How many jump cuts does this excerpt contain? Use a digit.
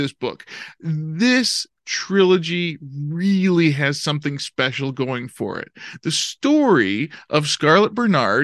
0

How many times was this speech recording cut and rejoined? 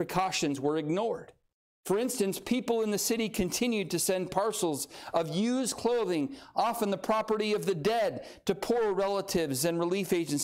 0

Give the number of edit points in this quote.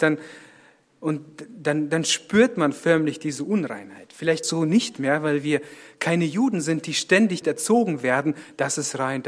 2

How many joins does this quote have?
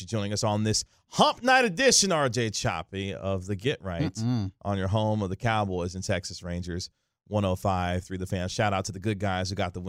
0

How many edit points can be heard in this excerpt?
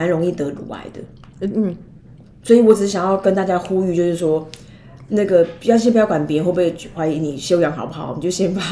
0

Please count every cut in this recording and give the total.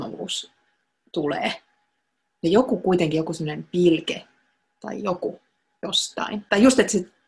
0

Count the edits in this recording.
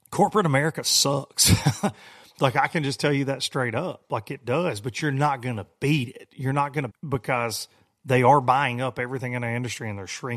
1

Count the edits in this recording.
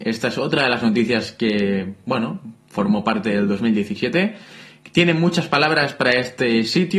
0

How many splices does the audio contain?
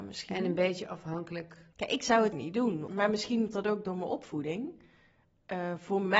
4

